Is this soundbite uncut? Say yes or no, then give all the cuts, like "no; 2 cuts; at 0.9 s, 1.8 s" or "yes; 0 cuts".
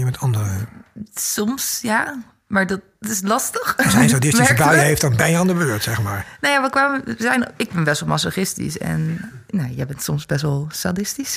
yes; 0 cuts